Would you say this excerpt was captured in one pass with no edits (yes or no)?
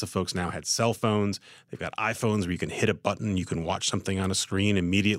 yes